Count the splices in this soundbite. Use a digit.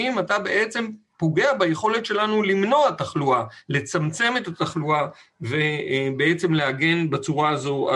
0